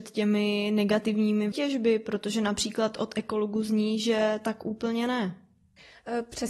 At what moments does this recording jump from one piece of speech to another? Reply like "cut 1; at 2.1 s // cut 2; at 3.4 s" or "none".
cut 1; at 1.5 s